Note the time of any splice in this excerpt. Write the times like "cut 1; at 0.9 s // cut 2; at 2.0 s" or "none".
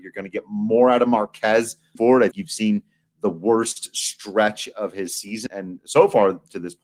cut 1; at 2.0 s // cut 2; at 2.3 s // cut 3; at 5.5 s